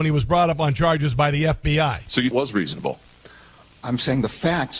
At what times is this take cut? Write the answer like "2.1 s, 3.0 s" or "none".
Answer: 2.3 s